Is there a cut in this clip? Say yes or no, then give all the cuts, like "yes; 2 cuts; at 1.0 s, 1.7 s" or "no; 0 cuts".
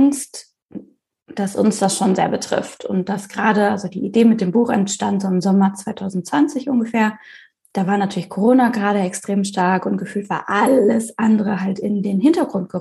no; 0 cuts